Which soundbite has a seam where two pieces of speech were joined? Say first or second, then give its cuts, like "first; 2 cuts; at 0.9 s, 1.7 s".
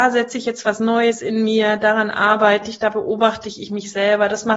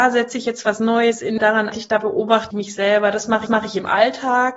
second; 4 cuts; at 1.4 s, 1.7 s, 2.5 s, 3.5 s